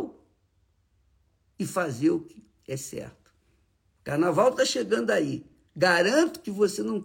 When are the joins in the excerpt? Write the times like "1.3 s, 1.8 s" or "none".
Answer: none